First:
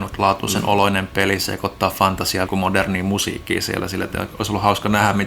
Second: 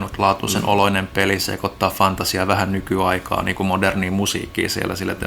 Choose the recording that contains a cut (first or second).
first